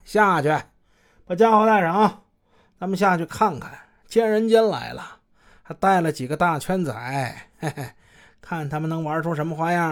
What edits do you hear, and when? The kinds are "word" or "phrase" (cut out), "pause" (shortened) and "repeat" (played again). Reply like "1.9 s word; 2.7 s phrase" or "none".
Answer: none

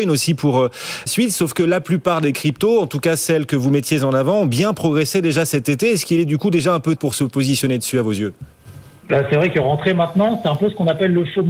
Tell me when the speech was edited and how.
1.1 s word; 7.0 s word

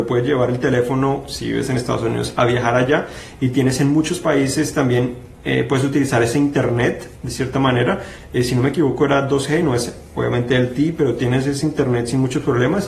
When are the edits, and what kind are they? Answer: none

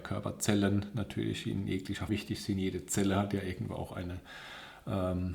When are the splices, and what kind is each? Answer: 2.1 s word

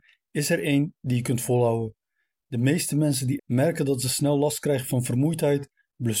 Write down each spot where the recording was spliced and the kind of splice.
3.4 s phrase

